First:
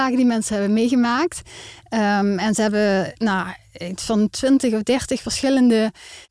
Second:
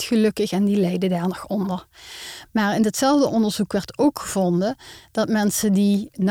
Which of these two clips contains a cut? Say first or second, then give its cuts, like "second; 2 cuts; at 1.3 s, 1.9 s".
first; 1 cut; at 3.2 s